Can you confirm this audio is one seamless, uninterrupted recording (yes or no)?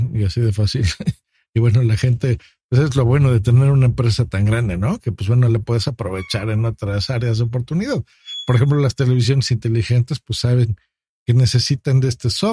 yes